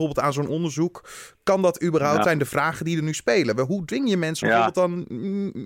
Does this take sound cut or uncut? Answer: cut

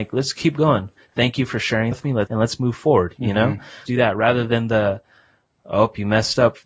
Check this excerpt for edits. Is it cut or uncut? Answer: cut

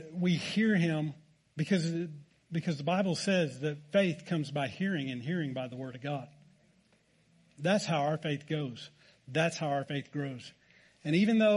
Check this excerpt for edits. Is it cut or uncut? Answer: uncut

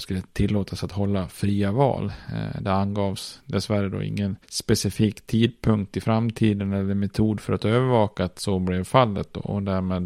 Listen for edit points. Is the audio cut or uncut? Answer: uncut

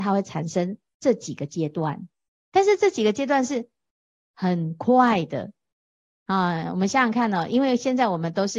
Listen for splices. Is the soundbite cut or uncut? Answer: uncut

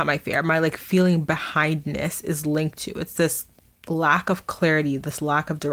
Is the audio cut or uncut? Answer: uncut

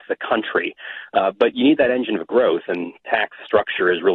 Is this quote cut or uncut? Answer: uncut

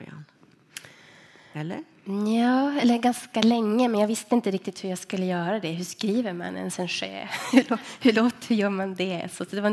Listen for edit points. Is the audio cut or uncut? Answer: uncut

